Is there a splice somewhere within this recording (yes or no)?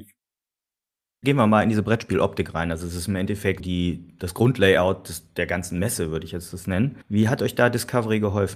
yes